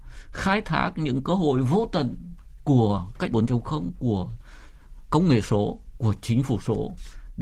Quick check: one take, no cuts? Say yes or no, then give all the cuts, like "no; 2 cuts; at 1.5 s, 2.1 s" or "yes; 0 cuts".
no; 2 cuts; at 3.3 s, 5.1 s